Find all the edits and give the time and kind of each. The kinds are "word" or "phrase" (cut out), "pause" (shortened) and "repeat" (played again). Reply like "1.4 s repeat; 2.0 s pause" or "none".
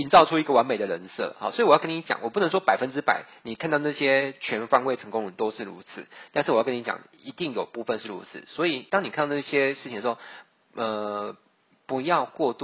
none